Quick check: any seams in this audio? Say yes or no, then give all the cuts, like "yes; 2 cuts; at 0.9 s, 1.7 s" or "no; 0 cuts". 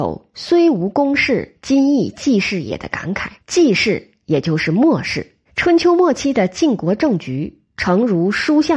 yes; 2 cuts; at 3.4 s, 5.5 s